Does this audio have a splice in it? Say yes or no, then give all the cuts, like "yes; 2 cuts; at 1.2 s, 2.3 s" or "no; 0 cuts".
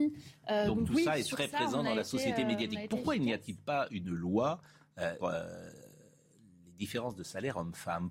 yes; 1 cut; at 5.2 s